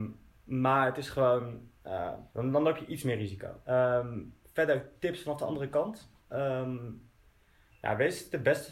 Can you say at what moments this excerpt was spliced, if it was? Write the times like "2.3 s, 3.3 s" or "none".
2.3 s, 6.1 s